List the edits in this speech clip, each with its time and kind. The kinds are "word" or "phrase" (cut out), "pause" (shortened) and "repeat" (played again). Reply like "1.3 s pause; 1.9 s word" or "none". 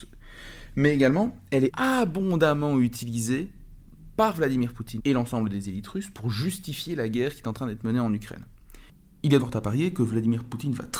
1.7 s word; 5.0 s word; 9.4 s word